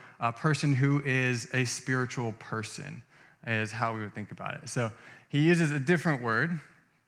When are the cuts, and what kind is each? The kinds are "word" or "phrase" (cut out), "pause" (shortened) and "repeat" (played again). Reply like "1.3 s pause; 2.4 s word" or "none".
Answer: none